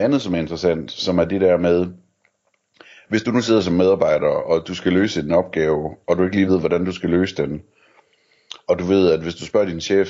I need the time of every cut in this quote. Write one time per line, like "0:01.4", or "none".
none